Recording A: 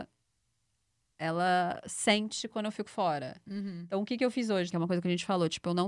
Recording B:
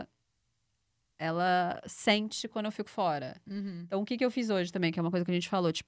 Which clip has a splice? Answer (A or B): A